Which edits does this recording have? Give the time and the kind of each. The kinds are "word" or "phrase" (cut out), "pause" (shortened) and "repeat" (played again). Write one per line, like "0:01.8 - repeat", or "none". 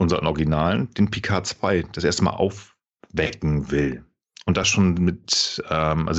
none